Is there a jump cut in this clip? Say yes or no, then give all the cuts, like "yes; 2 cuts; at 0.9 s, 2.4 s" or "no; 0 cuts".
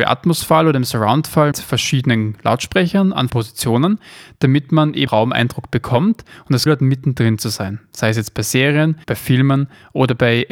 yes; 5 cuts; at 1.5 s, 3.3 s, 5.1 s, 6.7 s, 9.0 s